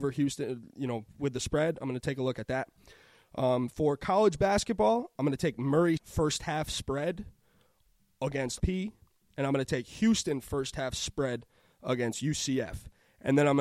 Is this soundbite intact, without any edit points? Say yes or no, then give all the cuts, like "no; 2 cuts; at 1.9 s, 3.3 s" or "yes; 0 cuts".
no; 2 cuts; at 6.0 s, 8.6 s